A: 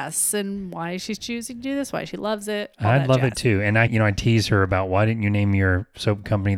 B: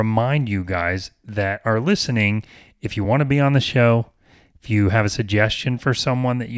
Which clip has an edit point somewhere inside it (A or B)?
A